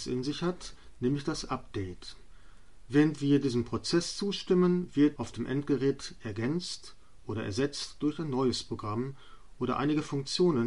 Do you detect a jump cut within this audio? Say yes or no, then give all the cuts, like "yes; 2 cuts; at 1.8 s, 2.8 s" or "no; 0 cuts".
yes; 1 cut; at 5.2 s